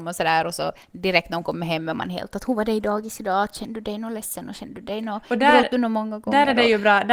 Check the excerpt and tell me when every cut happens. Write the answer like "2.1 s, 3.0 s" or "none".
none